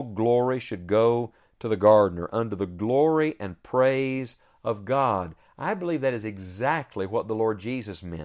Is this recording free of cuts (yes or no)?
yes